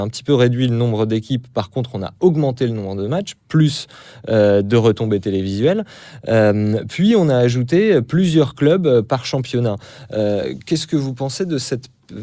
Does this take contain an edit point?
no; 0 cuts

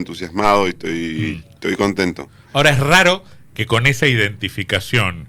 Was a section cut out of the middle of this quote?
no; 0 cuts

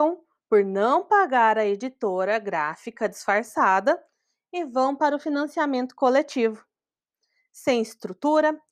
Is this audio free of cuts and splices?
yes; 0 cuts

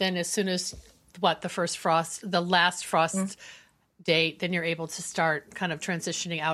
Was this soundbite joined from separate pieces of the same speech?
no; 0 cuts

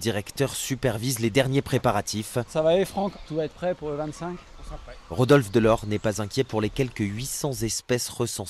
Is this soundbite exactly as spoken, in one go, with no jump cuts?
yes; 0 cuts

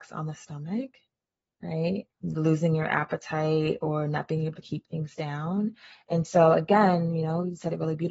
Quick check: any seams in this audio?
yes; 1 cut; at 2.1 s

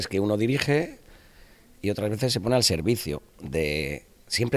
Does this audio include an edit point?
no; 0 cuts

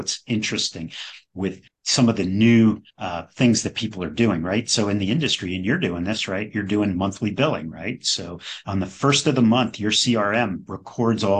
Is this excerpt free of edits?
no; 2 cuts; at 1.7 s, 2.9 s

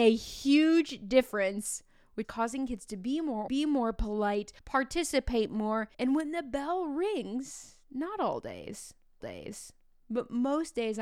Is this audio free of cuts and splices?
no; 5 cuts; at 2.2 s, 3.5 s, 4.6 s, 5.9 s, 9.2 s

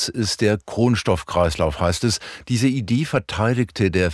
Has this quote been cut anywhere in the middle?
no; 0 cuts

